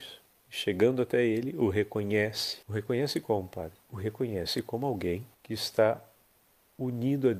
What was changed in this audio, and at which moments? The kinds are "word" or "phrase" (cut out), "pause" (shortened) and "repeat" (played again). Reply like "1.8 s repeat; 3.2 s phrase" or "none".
2.6 s pause; 5.3 s pause